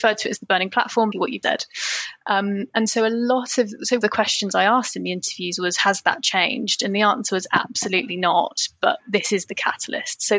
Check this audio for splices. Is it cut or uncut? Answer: cut